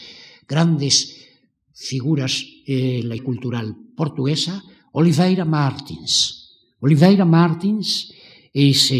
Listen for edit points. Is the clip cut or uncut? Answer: cut